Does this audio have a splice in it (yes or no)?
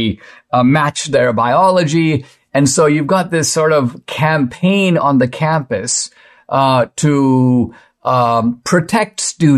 no